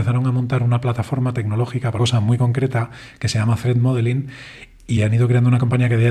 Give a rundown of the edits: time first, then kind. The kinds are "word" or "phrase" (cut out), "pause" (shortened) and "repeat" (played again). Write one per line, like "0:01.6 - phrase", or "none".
0:02.0 - word
0:05.0 - word